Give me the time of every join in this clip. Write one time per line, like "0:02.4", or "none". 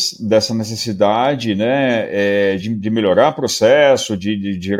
none